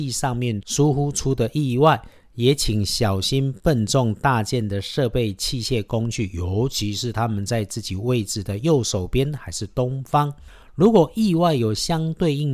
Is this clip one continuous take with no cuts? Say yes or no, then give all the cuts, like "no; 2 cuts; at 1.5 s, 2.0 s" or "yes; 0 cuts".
yes; 0 cuts